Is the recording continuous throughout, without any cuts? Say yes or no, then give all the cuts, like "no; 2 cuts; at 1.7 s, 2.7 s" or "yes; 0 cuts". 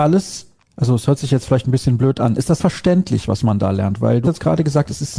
no; 2 cuts; at 2.6 s, 4.2 s